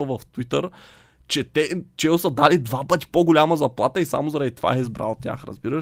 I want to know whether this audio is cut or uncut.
uncut